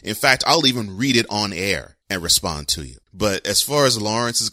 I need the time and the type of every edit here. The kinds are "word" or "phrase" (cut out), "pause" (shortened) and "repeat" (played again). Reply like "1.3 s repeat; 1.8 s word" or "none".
2.0 s pause; 3.0 s pause

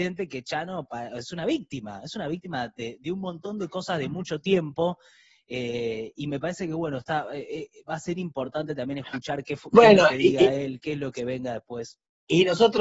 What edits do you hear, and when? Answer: none

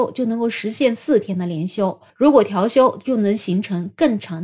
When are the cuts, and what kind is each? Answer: 2.1 s pause

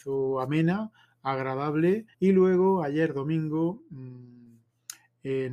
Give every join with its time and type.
2.1 s pause

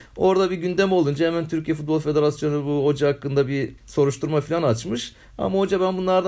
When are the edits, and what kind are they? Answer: 3.8 s pause

